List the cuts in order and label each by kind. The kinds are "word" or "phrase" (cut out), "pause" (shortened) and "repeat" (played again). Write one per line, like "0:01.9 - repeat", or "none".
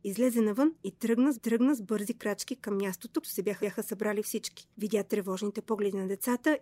0:01.3 - repeat
0:03.2 - word
0:03.6 - repeat
0:04.7 - pause